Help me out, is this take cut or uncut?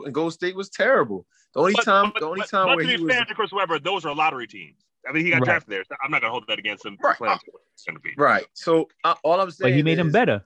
uncut